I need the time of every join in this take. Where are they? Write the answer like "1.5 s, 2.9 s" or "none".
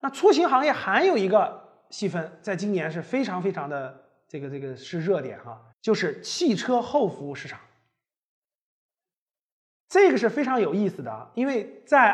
5.7 s